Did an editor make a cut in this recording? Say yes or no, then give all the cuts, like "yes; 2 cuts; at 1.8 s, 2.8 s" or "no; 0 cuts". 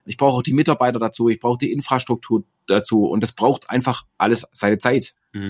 yes; 1 cut; at 4.1 s